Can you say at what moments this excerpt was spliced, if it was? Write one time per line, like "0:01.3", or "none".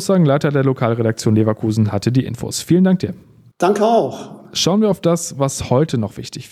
none